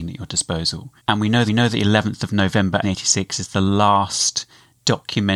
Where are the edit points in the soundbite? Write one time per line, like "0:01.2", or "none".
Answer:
0:01.0
0:01.5
0:02.8